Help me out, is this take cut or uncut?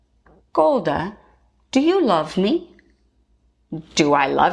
uncut